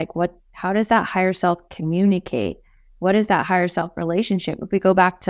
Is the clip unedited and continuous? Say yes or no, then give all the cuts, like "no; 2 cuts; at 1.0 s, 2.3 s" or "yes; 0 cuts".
yes; 0 cuts